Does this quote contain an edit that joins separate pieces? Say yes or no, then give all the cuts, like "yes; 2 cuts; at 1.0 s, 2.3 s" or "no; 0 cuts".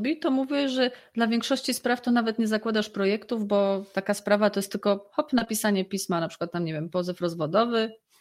no; 0 cuts